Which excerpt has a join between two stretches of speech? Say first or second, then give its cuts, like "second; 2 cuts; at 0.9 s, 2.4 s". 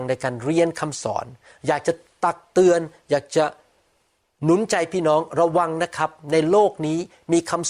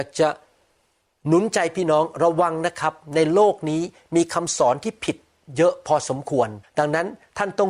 second; 1 cut; at 6.6 s